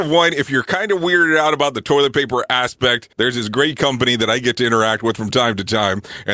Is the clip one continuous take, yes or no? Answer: no